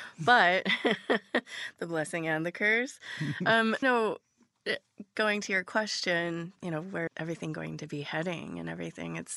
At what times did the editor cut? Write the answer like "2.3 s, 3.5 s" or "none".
3.8 s, 6.6 s, 7.1 s